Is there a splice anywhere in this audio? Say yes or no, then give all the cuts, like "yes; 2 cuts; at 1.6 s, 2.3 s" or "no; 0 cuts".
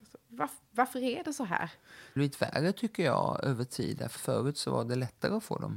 yes; 2 cuts; at 2.2 s, 4.2 s